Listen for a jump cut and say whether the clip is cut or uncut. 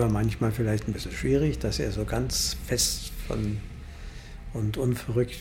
uncut